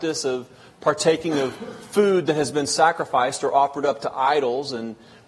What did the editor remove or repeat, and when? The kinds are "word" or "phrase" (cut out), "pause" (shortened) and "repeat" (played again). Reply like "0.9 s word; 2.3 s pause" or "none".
none